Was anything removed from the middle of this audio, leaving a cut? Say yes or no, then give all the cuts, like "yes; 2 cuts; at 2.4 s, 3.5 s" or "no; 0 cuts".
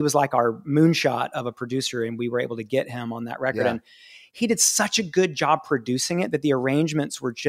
no; 0 cuts